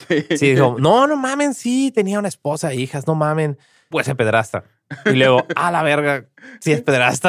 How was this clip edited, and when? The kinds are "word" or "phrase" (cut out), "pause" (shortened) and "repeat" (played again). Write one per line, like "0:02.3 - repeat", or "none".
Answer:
0:03.9 - word